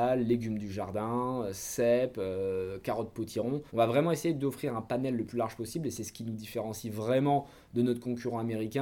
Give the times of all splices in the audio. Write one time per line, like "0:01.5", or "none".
0:03.7